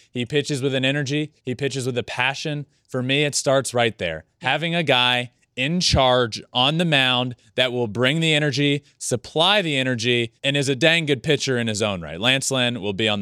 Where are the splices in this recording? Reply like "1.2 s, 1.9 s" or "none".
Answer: 1.4 s, 10.4 s